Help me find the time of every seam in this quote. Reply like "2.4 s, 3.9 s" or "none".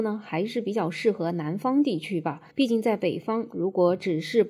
2.5 s